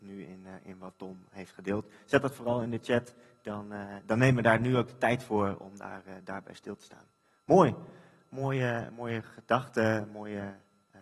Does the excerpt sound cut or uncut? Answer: uncut